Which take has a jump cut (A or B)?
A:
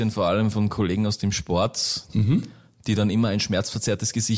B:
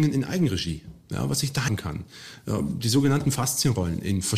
B